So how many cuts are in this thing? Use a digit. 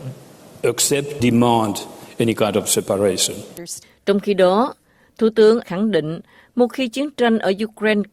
2